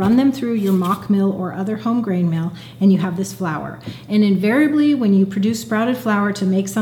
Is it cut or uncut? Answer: uncut